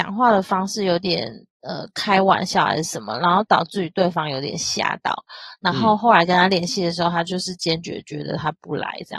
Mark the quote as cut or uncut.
cut